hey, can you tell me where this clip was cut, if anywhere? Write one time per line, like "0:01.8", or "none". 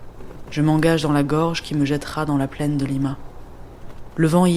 none